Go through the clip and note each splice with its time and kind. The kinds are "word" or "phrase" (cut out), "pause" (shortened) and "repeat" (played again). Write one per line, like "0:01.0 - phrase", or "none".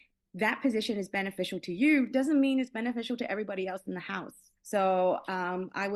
0:04.6 - pause

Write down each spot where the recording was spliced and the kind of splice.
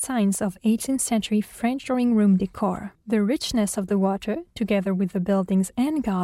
0:03.0 - pause

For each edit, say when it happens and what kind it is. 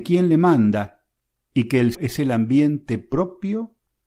0:01.9 - word

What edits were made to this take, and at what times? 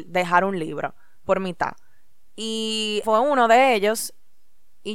0:03.0 - word

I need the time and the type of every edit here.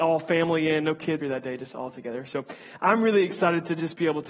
0:01.2 - word

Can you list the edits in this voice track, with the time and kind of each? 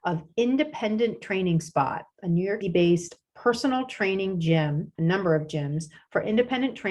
0:02.6 - word
0:04.9 - pause

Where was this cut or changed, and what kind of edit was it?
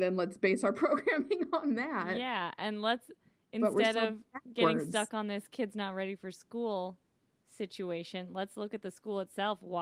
none

